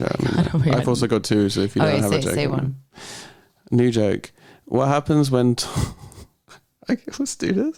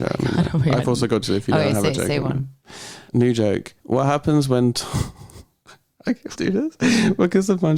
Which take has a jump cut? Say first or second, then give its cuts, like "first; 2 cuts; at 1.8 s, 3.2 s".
second; 4 cuts; at 1.2 s, 3.1 s, 3.8 s, 6.4 s